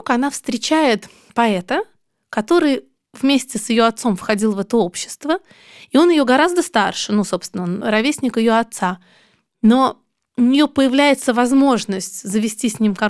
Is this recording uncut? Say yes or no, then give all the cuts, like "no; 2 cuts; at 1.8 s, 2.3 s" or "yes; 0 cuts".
yes; 0 cuts